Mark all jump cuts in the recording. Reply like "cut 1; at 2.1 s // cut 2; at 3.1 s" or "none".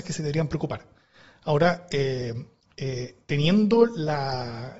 cut 1; at 2.6 s